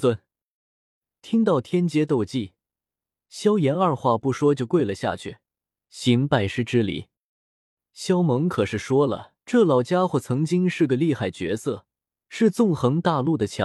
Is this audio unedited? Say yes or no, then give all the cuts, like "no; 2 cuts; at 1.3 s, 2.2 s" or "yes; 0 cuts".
no; 1 cut; at 9.4 s